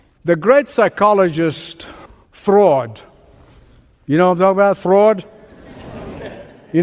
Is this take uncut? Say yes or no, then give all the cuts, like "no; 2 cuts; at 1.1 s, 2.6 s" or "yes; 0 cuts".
no; 1 cut; at 2.1 s